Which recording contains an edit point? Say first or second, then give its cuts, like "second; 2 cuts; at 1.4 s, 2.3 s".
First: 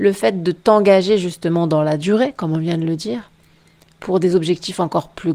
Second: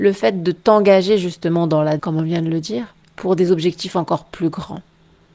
second; 2 cuts; at 2.0 s, 3.0 s